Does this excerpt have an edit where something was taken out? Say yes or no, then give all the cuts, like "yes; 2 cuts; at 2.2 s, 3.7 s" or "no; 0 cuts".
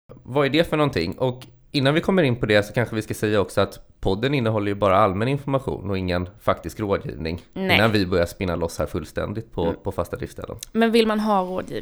no; 0 cuts